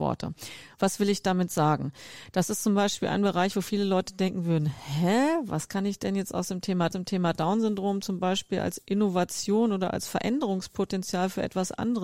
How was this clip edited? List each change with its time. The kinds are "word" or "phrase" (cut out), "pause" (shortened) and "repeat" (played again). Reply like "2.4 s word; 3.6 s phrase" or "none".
6.9 s repeat